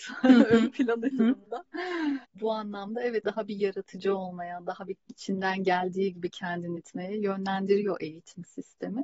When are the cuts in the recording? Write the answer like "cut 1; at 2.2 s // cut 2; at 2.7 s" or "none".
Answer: cut 1; at 1.1 s // cut 2; at 2.2 s // cut 3; at 3.2 s // cut 4; at 6.8 s